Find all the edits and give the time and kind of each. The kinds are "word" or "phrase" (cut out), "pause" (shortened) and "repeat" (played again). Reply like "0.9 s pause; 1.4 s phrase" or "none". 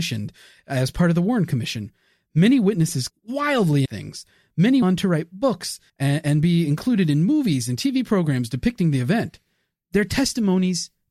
3.1 s word; 3.9 s word; 4.8 s word; 5.9 s pause